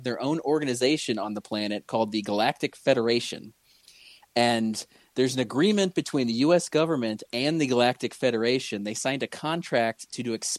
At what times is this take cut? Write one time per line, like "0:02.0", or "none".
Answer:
none